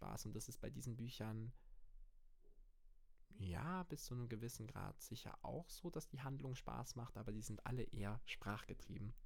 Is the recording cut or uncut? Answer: uncut